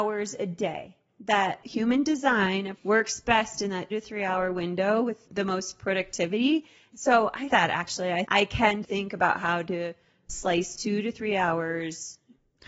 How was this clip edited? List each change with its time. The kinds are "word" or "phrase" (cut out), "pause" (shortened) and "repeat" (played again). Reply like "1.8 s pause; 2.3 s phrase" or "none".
1.6 s word; 2.7 s word; 3.9 s word; 7.5 s word; 8.2 s word; 8.8 s word